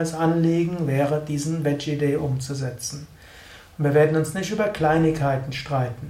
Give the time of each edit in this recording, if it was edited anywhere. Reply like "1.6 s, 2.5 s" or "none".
none